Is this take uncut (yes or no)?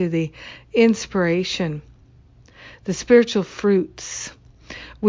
yes